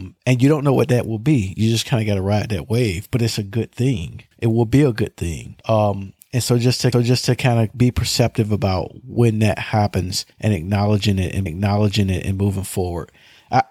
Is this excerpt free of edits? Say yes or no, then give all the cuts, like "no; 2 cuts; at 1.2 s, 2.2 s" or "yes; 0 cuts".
no; 5 cuts; at 4.3 s, 5.6 s, 6.9 s, 10.3 s, 11.5 s